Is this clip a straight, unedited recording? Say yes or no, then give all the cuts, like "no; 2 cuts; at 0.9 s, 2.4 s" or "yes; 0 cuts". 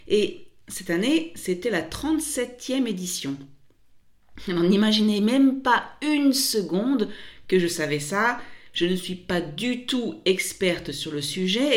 yes; 0 cuts